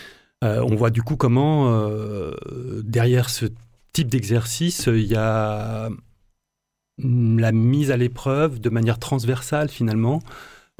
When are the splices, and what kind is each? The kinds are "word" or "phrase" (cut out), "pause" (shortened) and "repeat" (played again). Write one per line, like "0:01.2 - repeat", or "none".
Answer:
none